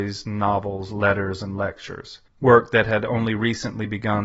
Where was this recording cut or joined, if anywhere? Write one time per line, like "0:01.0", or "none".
0:02.3